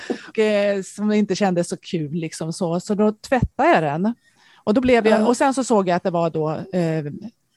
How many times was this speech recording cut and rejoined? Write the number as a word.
zero